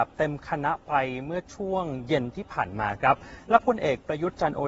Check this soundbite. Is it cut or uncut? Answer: uncut